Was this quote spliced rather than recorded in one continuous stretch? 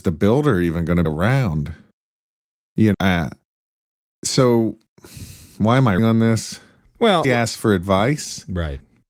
yes; 4 cuts; at 1.0 s, 2.9 s, 6.0 s, 7.2 s

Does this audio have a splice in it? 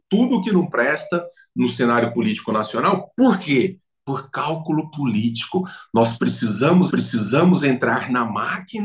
yes; 1 cut; at 6.9 s

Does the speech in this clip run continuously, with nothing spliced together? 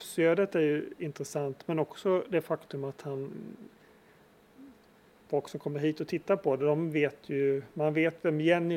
yes; 0 cuts

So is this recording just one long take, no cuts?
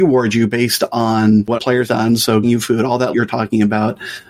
no; 4 cuts; at 1.6 s, 1.9 s, 2.4 s, 3.1 s

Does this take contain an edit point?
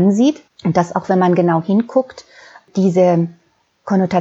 no; 0 cuts

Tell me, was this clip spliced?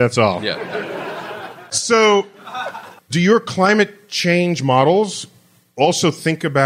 no; 0 cuts

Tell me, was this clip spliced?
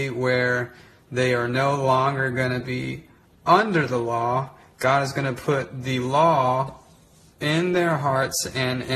no; 0 cuts

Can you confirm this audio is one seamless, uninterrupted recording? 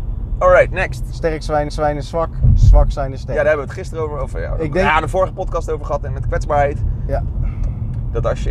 no; 1 cut; at 1.7 s

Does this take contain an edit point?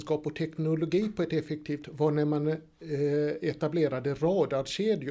yes; 1 cut; at 1.8 s

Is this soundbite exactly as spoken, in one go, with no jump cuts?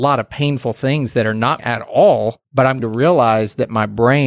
no; 3 cuts; at 1.6 s, 2.4 s, 2.8 s

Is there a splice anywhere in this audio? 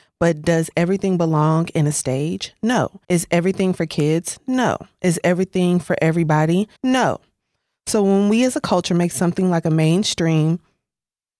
yes; 2 cuts; at 3.0 s, 6.8 s

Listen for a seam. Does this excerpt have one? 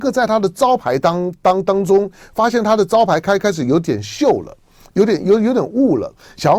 no; 0 cuts

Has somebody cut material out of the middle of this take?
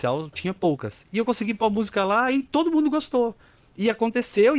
no; 0 cuts

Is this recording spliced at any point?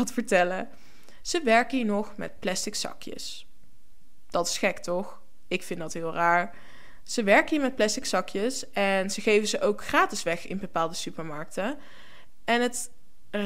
no; 0 cuts

